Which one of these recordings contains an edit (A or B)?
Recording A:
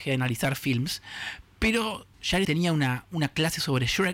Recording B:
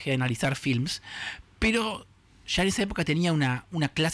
A